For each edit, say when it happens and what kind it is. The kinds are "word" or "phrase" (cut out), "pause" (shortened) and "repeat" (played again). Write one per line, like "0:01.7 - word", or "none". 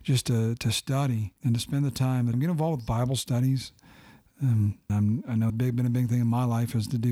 0:01.4 - pause
0:02.3 - phrase
0:04.9 - word
0:05.5 - phrase